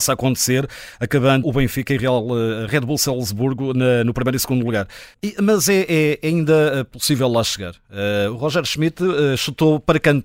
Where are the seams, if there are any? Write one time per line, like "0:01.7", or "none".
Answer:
0:01.4
0:05.1